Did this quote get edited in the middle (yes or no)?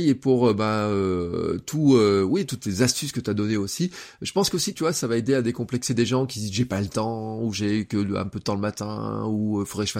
yes